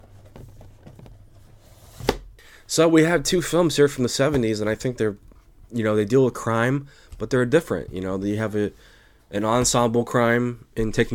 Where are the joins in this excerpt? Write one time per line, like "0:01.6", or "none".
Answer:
none